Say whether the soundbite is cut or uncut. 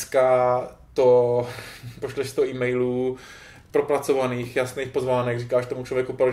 uncut